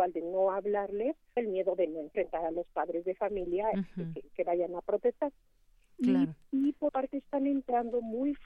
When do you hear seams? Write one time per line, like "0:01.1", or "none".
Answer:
0:01.4
0:06.9